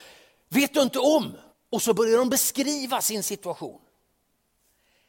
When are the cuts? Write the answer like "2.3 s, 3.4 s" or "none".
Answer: 1.5 s